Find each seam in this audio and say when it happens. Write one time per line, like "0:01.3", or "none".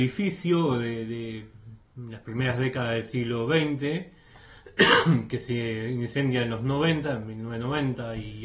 none

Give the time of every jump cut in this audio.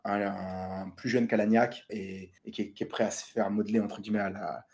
0:01.9
0:02.4

